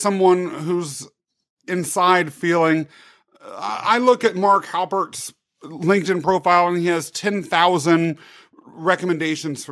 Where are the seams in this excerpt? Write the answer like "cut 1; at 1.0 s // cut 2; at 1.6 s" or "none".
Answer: none